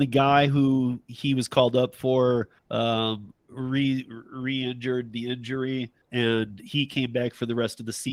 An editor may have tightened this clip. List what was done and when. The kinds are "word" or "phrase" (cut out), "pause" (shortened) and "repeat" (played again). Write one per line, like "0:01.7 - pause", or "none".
0:02.6 - pause
0:06.0 - pause